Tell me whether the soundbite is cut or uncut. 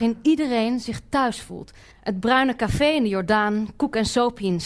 cut